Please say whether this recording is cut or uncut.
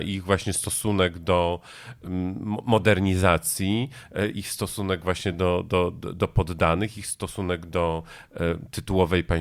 uncut